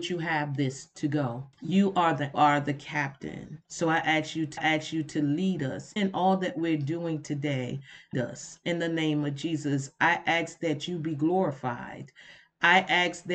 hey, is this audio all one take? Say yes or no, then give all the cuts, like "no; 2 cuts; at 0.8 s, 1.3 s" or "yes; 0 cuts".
no; 6 cuts; at 1.5 s, 2.3 s, 3.6 s, 4.6 s, 6.0 s, 8.1 s